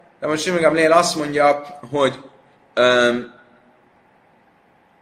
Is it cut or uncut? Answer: uncut